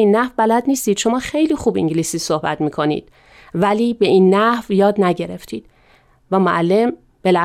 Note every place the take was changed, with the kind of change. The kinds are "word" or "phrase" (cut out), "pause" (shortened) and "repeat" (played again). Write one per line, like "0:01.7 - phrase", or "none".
none